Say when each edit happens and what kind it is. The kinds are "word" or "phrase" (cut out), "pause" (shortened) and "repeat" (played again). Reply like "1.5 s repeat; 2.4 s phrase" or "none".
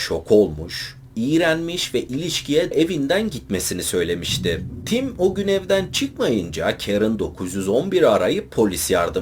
2.7 s phrase